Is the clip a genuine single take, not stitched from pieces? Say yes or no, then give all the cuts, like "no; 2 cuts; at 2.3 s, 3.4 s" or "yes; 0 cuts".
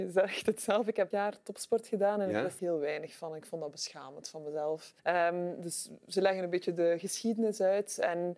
no; 3 cuts; at 1.1 s, 2.6 s, 5.0 s